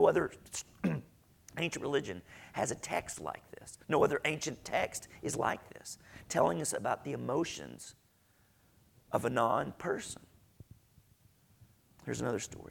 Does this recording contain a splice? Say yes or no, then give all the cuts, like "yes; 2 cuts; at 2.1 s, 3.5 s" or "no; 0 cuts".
no; 0 cuts